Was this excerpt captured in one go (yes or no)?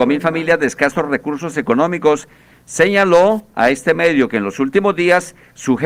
yes